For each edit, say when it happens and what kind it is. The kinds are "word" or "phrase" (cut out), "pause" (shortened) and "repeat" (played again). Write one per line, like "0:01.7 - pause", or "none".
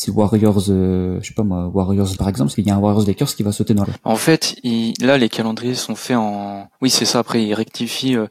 0:02.2 - word
0:02.5 - word
0:03.8 - phrase

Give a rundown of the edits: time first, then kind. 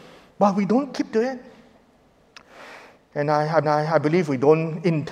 0:03.6 - repeat

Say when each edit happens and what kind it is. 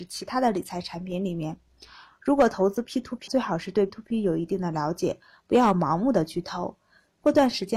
0:03.3 - word
0:03.9 - word

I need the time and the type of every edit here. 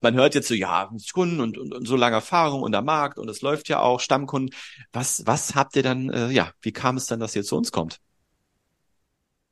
none

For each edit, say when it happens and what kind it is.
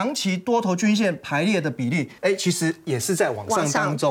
0:02.2 - pause

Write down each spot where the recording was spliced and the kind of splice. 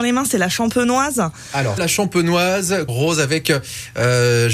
0:01.8 - word
0:02.9 - word

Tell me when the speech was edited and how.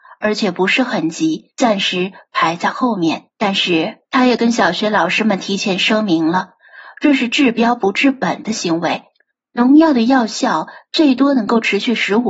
0:01.5 - pause
0:03.3 - pause
0:04.0 - pause
0:09.3 - pause

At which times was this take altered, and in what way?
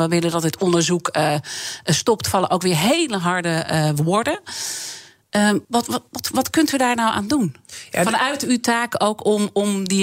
0:05.6 - pause
0:06.1 - pause

